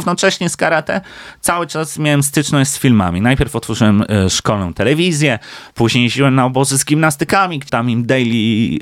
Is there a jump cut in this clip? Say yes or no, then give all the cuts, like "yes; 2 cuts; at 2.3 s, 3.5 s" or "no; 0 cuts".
yes; 1 cut; at 7.7 s